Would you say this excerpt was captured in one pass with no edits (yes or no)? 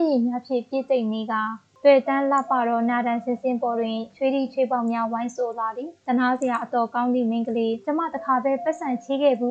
no